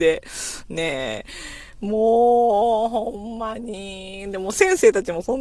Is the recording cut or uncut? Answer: uncut